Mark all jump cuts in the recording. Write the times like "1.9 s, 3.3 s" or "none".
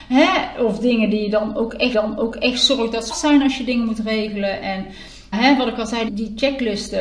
1.9 s, 3.1 s, 5.3 s, 6.1 s